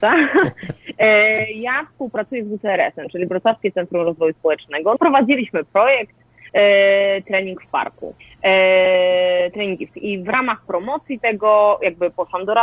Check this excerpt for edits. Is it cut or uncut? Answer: cut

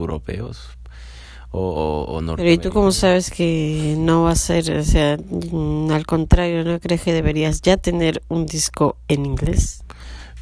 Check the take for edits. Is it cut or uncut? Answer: uncut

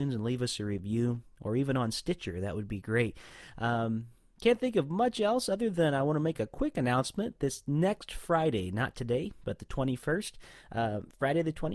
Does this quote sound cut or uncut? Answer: uncut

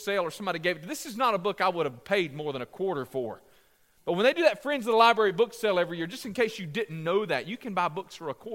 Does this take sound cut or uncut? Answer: uncut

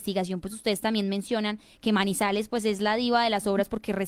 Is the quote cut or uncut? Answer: uncut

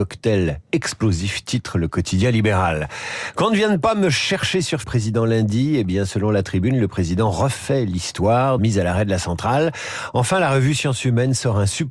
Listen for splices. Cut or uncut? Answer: cut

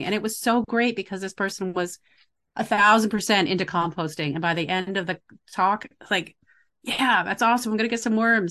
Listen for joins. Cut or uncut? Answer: uncut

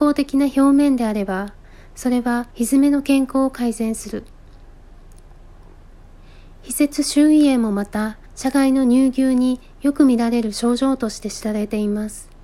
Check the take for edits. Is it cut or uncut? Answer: cut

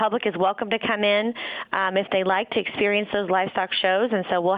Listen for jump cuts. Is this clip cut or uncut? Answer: uncut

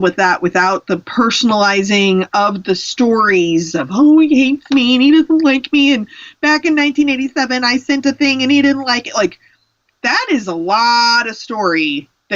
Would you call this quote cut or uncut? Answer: uncut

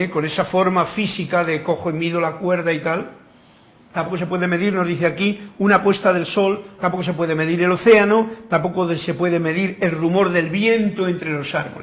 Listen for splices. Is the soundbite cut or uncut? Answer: uncut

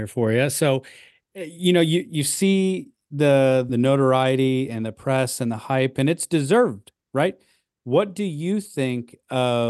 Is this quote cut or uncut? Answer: cut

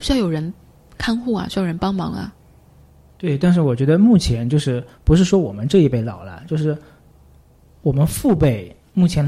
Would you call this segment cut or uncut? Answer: uncut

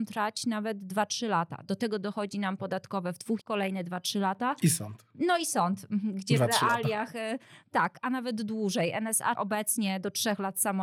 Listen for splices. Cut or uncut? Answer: cut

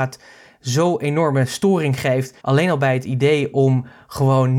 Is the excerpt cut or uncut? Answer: cut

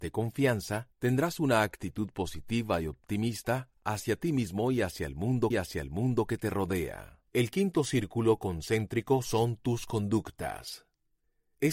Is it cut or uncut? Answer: cut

